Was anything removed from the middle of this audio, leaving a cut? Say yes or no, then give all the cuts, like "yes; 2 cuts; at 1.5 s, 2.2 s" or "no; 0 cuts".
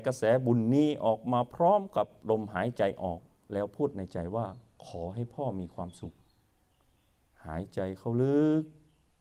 no; 0 cuts